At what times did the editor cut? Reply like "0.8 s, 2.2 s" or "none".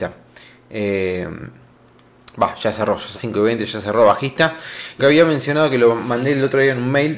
3.2 s, 5.0 s